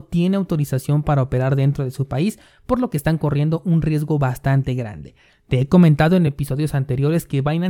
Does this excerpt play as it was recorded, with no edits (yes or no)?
yes